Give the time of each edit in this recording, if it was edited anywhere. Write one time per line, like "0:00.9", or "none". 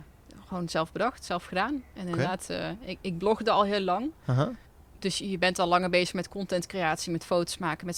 0:04.6